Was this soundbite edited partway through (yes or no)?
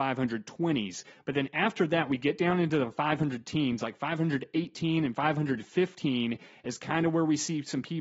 no